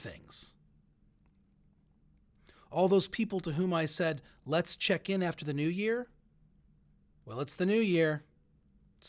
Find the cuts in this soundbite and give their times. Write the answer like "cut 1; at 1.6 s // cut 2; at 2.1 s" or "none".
none